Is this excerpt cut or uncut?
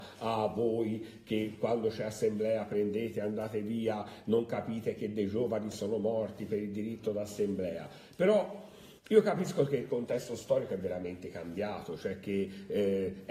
cut